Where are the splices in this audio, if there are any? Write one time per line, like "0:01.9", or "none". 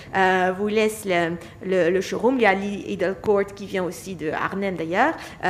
none